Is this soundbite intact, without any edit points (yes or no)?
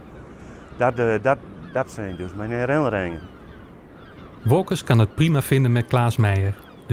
yes